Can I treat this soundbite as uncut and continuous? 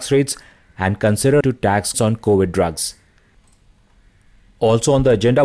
no; 2 cuts; at 1.4 s, 1.9 s

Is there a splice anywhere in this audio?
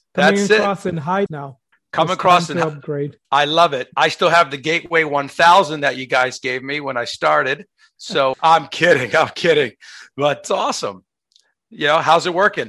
yes; 5 cuts; at 1.3 s, 1.7 s, 3.2 s, 8.3 s, 10.4 s

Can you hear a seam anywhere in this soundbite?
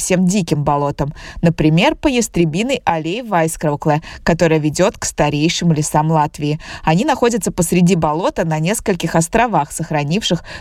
no; 0 cuts

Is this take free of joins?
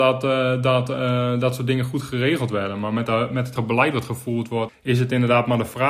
no; 2 cuts; at 3.6 s, 4.7 s

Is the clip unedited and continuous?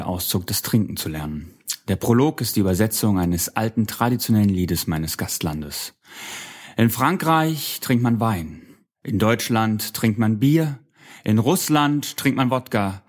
yes; 0 cuts

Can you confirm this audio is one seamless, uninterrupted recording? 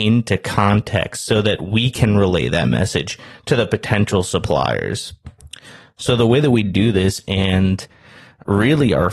yes; 0 cuts

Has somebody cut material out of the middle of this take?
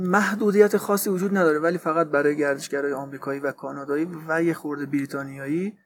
no; 0 cuts

